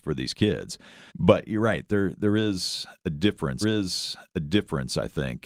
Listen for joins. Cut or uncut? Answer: cut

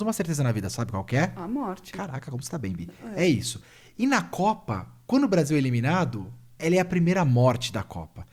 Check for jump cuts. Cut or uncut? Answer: uncut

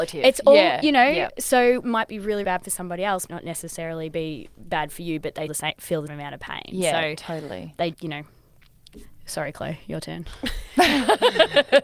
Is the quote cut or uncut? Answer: cut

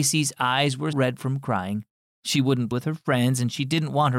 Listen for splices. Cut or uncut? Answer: cut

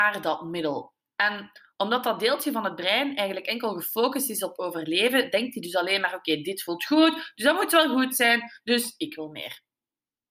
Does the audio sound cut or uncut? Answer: uncut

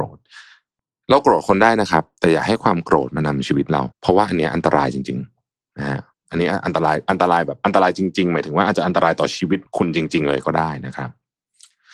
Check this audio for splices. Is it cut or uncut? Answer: cut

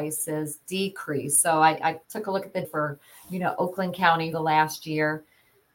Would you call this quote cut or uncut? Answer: cut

